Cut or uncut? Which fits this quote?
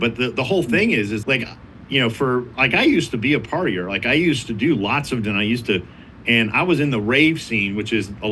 cut